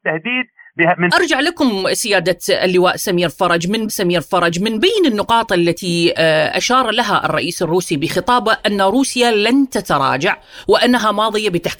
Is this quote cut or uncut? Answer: cut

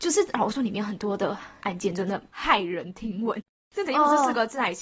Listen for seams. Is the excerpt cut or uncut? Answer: uncut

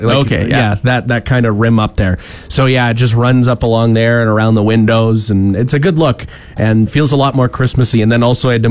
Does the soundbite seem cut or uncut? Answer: cut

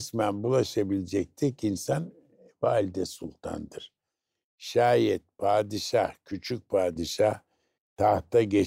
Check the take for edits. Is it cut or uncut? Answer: uncut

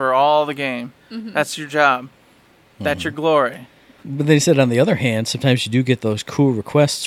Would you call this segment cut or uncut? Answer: uncut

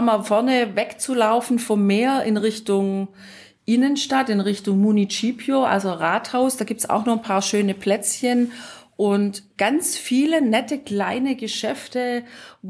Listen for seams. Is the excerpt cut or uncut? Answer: uncut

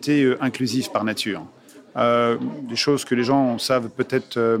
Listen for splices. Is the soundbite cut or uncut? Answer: uncut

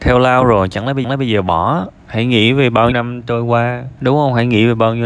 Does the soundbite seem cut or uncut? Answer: cut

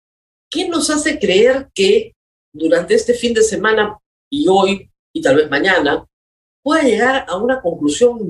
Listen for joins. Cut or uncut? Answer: uncut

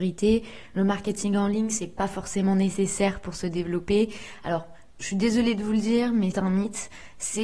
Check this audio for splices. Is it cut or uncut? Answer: cut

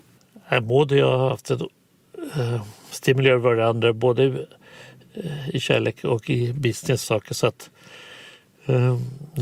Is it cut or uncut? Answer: cut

